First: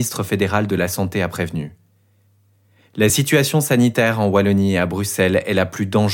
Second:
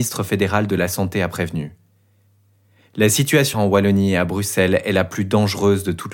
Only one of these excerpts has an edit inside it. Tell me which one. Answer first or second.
second